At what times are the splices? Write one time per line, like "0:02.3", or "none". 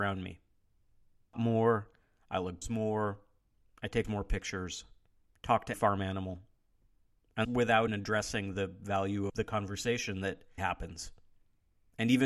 0:01.3
0:02.6
0:04.0
0:05.7
0:07.4
0:07.9
0:09.3
0:10.6